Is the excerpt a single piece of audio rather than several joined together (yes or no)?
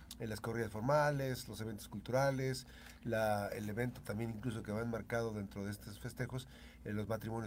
yes